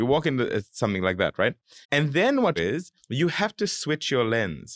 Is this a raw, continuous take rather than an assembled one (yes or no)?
no